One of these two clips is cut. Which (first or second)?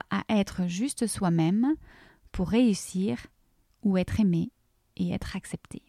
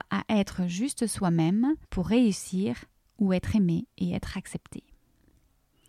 second